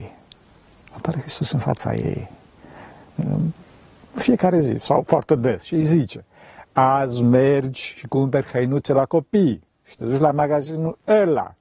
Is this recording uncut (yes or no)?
yes